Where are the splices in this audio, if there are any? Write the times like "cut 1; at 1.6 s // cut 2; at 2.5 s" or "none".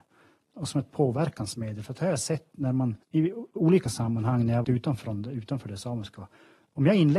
cut 1; at 3.0 s // cut 2; at 3.8 s // cut 3; at 4.6 s